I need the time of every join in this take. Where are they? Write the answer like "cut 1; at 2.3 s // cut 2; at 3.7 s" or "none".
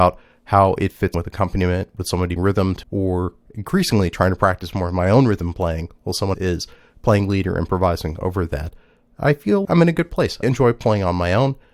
cut 1; at 1.1 s // cut 2; at 2.4 s // cut 3; at 2.8 s // cut 4; at 6.3 s // cut 5; at 9.6 s // cut 6; at 10.4 s